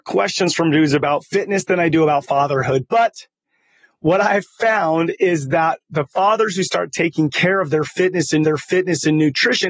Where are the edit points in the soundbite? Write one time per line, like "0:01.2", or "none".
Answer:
0:08.4